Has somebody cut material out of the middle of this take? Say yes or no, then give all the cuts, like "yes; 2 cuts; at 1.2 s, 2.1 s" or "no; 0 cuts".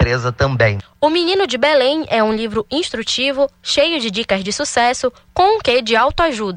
no; 0 cuts